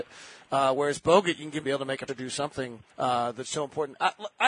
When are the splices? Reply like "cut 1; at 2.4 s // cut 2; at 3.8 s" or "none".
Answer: cut 1; at 1.6 s // cut 2; at 2.1 s // cut 3; at 2.9 s